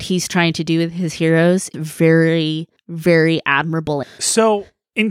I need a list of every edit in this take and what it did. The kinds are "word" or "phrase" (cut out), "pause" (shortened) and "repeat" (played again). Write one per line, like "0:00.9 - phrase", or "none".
0:01.7 - word
0:04.0 - phrase